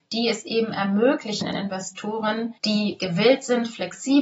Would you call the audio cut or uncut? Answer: cut